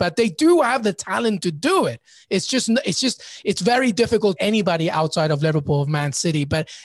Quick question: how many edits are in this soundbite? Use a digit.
1